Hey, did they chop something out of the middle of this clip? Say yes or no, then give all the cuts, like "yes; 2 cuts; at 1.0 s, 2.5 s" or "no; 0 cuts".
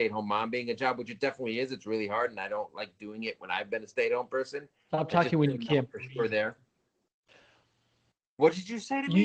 no; 0 cuts